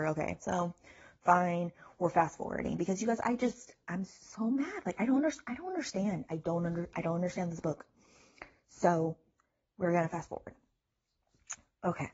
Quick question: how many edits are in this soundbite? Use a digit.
0